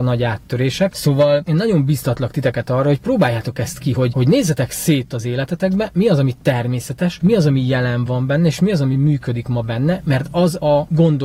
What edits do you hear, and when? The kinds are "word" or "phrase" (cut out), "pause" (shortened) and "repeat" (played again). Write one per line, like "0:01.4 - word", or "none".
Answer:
none